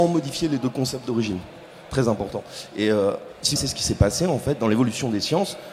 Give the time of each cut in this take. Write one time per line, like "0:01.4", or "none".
0:03.6